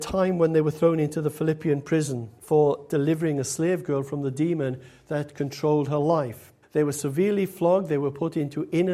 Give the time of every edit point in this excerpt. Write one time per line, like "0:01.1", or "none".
0:02.4
0:06.6